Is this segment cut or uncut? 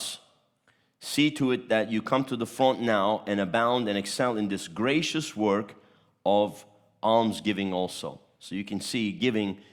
uncut